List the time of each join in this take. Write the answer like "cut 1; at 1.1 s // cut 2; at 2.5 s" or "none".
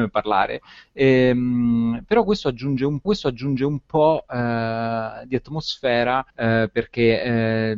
cut 1; at 3.0 s // cut 2; at 6.3 s